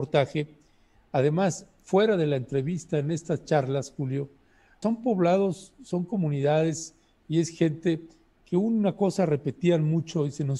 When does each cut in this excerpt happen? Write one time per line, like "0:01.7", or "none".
0:04.8